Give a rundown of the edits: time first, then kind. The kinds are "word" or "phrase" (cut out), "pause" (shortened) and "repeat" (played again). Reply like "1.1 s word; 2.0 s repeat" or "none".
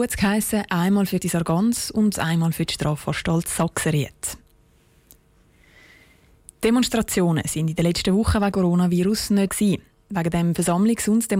1.2 s word; 8.5 s word; 9.5 s word